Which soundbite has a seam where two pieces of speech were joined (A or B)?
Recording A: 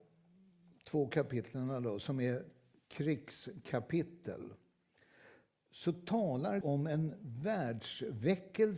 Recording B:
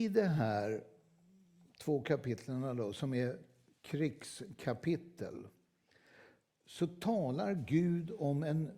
A